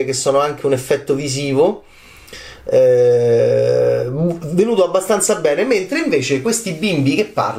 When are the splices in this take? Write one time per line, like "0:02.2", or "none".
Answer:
none